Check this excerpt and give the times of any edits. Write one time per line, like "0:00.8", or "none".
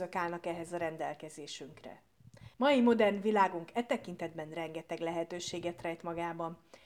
0:02.5